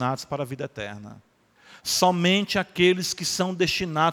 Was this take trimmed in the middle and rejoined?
yes; 1 cut; at 1.6 s

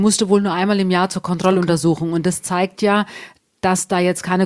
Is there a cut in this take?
no; 0 cuts

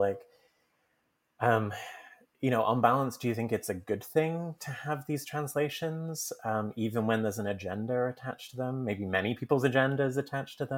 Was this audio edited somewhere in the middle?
no; 0 cuts

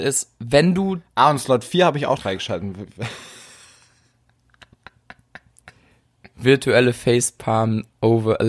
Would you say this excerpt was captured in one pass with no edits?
no; 1 cut; at 2.2 s

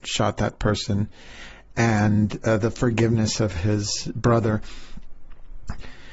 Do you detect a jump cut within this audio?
no; 0 cuts

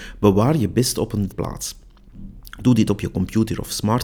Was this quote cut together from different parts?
yes; 2 cuts; at 1.3 s, 2.9 s

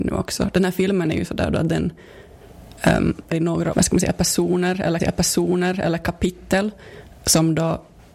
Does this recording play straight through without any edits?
no; 3 cuts; at 3.3 s, 3.7 s, 5.0 s

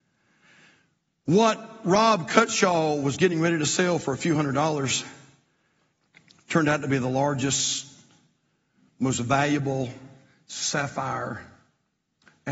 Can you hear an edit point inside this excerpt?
no; 0 cuts

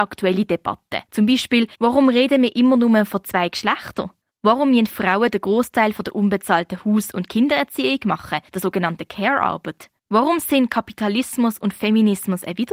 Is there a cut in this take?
yes; 5 cuts; at 1.1 s, 1.7 s, 4.2 s, 8.5 s, 10.0 s

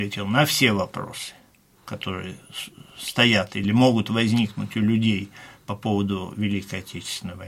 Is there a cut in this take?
no; 0 cuts

